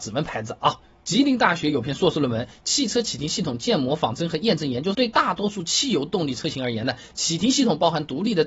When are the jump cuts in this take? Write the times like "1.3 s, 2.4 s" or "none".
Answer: 4.9 s